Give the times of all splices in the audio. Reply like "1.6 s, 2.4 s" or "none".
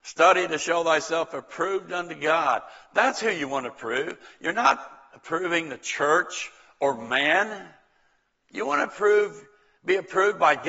none